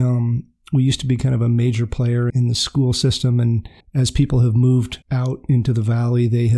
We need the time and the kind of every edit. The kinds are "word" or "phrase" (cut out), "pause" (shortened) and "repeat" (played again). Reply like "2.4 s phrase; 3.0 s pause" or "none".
2.3 s word; 3.8 s pause; 5.0 s pause